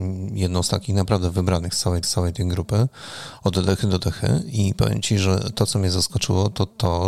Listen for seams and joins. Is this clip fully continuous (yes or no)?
no